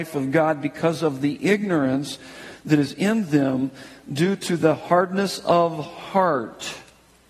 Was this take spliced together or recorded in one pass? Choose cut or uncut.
uncut